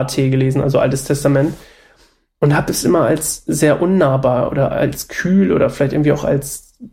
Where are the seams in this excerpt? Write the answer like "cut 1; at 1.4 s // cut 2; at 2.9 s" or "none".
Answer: none